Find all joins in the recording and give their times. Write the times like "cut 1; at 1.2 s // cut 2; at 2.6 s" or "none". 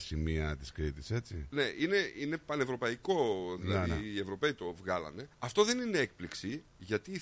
cut 1; at 5.3 s